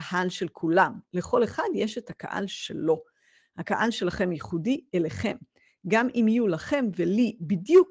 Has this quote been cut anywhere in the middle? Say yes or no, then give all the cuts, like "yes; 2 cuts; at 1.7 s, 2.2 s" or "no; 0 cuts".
no; 0 cuts